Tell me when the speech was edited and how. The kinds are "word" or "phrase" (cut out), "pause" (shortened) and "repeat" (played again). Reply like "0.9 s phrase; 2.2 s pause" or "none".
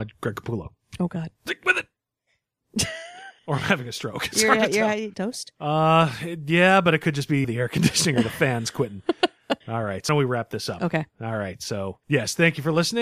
3.4 s pause; 5.1 s phrase; 7.4 s word; 9.6 s pause; 10.1 s word; 12.0 s pause